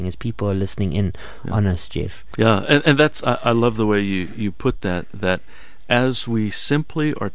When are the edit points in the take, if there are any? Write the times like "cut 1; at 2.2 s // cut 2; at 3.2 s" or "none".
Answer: cut 1; at 2.3 s